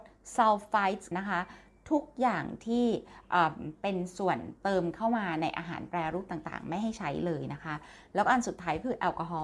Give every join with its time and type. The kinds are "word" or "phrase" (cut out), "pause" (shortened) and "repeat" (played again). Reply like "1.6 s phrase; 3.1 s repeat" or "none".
1.1 s word

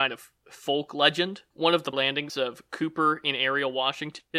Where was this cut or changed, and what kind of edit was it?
1.9 s word; 2.3 s word

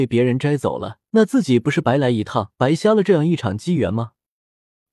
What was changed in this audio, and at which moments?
1.1 s pause; 2.5 s pause

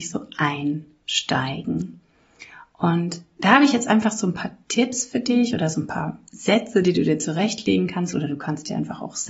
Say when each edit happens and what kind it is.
none

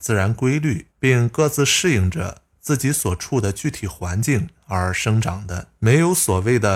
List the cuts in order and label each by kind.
0.9 s pause; 5.8 s pause

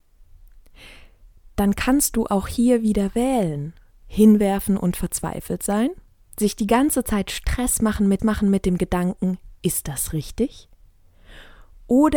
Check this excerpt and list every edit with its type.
8.2 s repeat; 9.6 s pause

